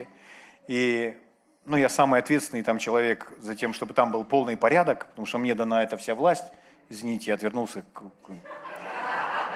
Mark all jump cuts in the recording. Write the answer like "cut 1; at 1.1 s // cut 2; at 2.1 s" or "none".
none